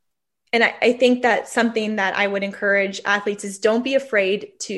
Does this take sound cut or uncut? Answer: uncut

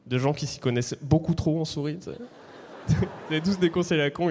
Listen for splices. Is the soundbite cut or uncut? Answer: uncut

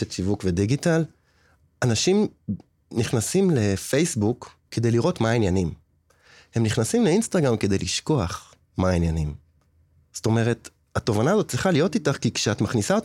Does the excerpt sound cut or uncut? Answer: cut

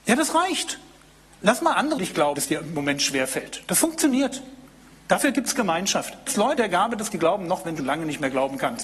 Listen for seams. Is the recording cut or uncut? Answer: cut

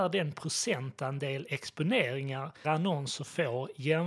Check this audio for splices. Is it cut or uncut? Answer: cut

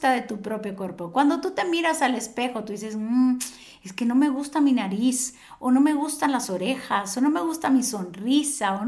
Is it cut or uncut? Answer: uncut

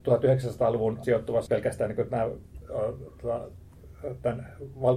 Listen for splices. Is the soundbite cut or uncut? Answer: cut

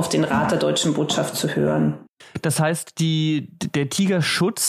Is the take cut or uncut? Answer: uncut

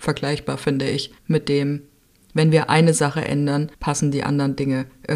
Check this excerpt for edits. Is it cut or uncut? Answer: cut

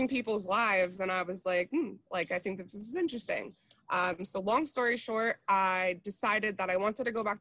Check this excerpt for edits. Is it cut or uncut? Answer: uncut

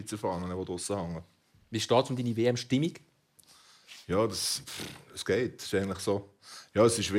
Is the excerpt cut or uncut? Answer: uncut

